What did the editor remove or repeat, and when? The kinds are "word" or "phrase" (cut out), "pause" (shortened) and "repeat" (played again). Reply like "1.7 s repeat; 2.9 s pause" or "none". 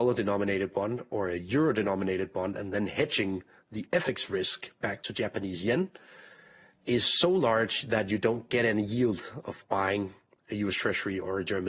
none

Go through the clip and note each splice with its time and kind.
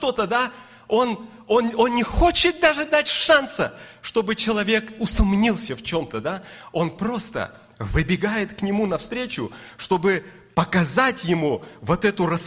none

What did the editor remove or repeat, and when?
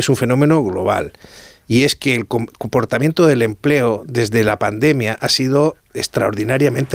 none

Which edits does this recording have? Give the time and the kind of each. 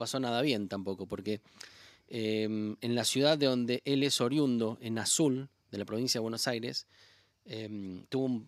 none

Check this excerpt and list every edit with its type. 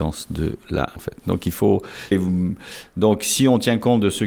1.0 s word; 2.1 s phrase

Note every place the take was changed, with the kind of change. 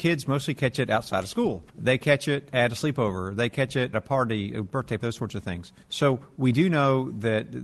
1.7 s pause; 3.9 s word; 5.0 s word; 5.8 s pause

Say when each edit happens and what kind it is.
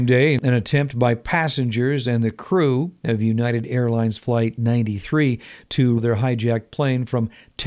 6.0 s phrase

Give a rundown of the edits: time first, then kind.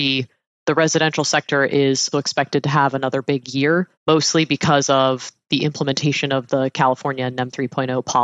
2.1 s word; 4.0 s pause

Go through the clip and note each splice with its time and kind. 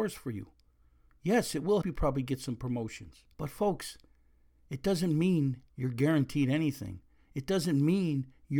1.8 s word; 3.3 s pause; 5.7 s pause

